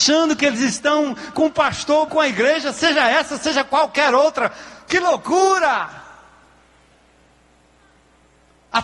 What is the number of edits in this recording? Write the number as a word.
two